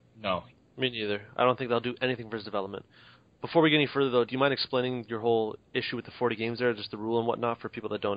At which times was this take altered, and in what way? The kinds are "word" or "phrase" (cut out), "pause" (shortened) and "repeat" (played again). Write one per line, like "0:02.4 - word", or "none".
0:04.3 - word